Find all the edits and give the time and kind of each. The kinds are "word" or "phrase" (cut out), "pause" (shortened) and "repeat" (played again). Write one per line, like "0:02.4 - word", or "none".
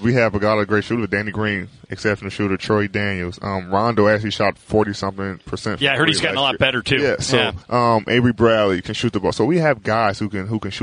0:07.6 - pause